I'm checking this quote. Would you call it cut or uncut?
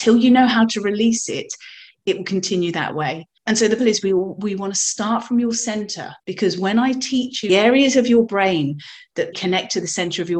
cut